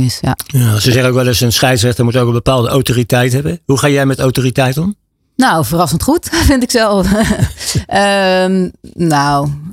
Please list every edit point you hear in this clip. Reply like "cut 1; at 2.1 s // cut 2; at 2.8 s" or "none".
cut 1; at 5.1 s